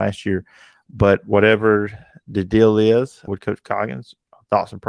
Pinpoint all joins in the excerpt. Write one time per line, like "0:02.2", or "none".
0:03.3